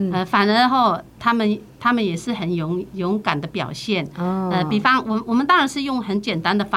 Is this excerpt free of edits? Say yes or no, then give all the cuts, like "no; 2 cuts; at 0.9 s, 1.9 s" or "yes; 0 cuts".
yes; 0 cuts